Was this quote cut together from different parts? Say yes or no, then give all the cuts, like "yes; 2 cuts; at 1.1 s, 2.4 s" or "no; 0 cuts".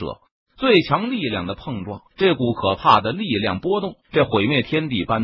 yes; 2 cuts; at 2.1 s, 4.0 s